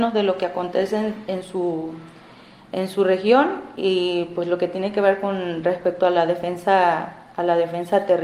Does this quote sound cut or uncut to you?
uncut